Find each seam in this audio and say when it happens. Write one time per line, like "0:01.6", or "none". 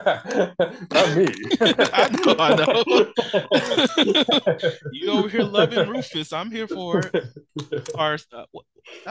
none